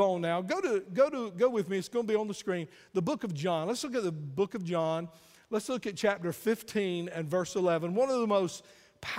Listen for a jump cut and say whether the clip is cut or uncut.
uncut